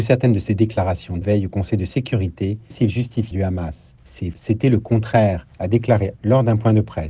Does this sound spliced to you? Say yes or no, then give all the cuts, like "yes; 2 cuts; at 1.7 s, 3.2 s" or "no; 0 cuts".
yes; 5 cuts; at 1.2 s, 2.7 s, 3.3 s, 4.3 s, 6.2 s